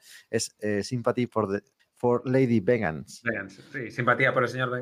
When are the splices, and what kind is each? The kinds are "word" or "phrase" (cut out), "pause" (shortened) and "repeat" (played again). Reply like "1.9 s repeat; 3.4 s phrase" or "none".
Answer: 1.8 s pause